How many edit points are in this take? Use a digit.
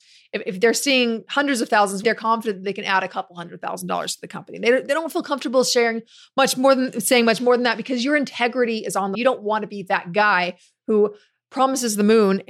2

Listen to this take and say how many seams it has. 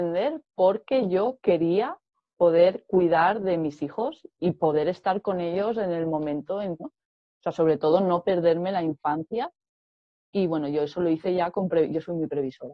2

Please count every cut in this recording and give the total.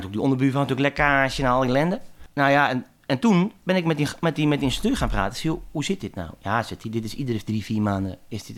0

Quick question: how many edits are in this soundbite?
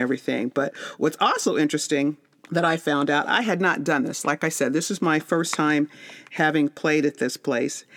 0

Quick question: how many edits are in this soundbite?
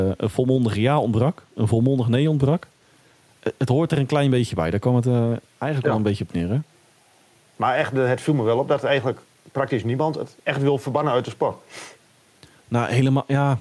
1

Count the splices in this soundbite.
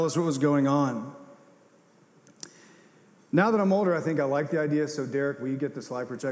0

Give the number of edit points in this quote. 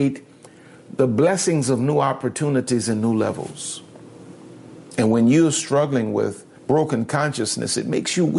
1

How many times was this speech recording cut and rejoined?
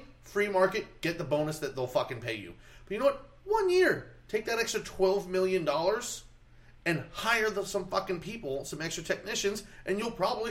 0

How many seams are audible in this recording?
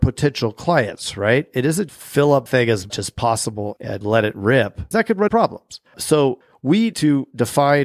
8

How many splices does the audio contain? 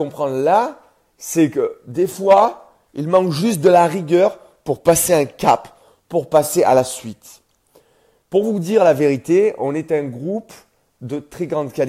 0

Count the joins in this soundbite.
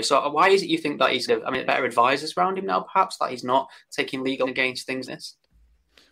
4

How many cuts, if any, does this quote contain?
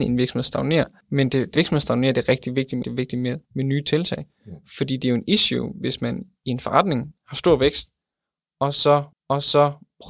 5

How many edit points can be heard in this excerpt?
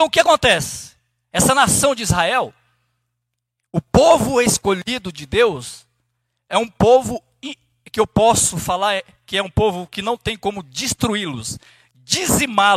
0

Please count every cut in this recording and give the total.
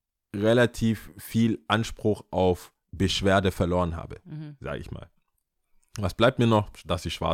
1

